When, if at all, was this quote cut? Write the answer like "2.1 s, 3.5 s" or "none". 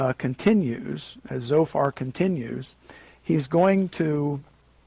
none